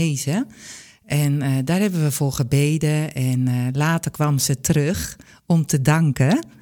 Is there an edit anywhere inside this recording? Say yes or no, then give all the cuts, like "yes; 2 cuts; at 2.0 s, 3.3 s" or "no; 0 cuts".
no; 0 cuts